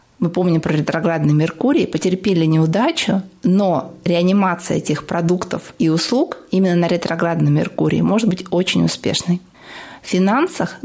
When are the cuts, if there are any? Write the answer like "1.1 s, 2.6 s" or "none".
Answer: none